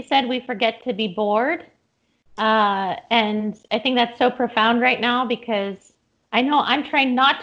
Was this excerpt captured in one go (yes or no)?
yes